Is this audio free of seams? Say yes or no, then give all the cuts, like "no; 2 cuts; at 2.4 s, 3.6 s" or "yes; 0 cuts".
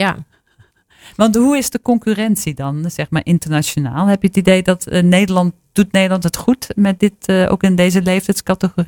yes; 0 cuts